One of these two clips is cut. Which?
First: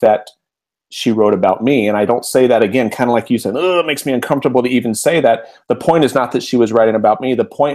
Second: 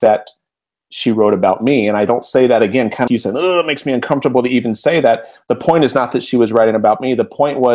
second; 1 cut; at 3.1 s

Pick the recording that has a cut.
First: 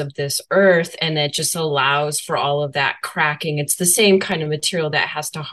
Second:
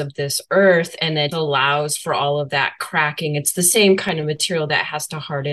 second; 1 cut; at 1.3 s

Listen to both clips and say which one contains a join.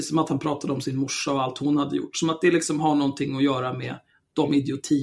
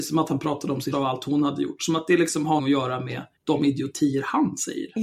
second; 3 cuts; at 0.9 s, 2.6 s, 3.4 s

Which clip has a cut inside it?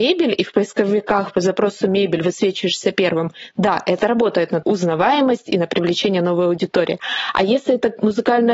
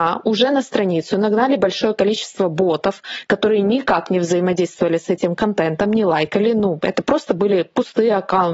first; 1 cut; at 4.6 s

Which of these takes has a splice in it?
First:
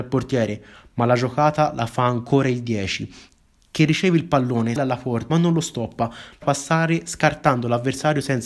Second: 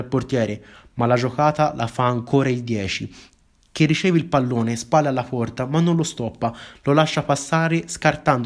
first; 3 cuts; at 4.8 s, 5.3 s, 6.4 s

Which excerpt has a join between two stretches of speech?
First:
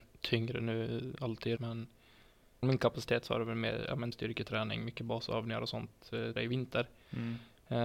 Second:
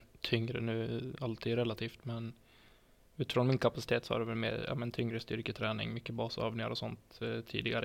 first; 4 cuts; at 1.6 s, 2.6 s, 4.1 s, 6.4 s

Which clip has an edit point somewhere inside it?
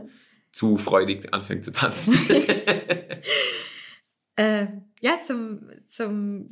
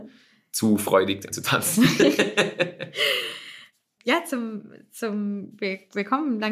second; 2 cuts; at 1.3 s, 4.0 s

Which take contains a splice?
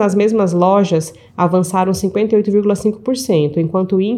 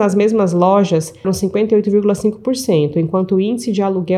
second; 1 cut; at 1.2 s

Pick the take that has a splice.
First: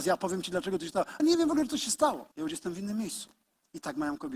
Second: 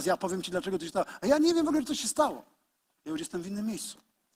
first; 2 cuts; at 1.2 s, 2.3 s

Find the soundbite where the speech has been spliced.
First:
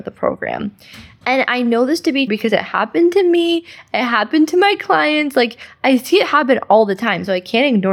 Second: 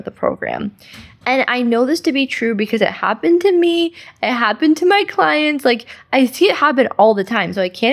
first; 1 cut; at 2.3 s

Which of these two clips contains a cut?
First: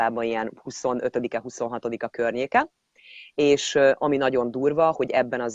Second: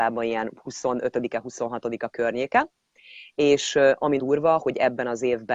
second; 1 cut; at 4.2 s

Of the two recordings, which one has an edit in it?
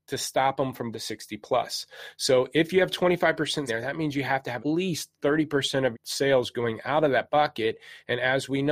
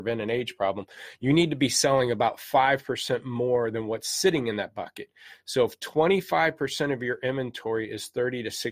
first; 4 cuts; at 0.9 s, 3.7 s, 4.6 s, 5.9 s

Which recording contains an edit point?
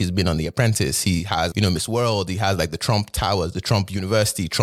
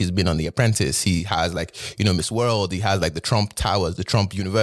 first; 1 cut; at 1.5 s

